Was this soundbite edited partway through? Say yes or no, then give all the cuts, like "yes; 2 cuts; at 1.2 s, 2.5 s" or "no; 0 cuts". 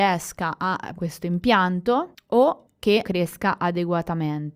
yes; 2 cuts; at 0.9 s, 3.0 s